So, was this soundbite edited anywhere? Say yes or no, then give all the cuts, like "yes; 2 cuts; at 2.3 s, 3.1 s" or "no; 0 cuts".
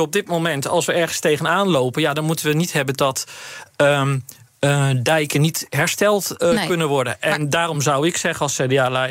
no; 0 cuts